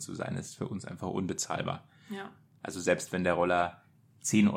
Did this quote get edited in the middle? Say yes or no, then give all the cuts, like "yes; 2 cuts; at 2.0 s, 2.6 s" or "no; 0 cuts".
no; 0 cuts